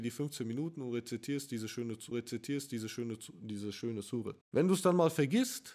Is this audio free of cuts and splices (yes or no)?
no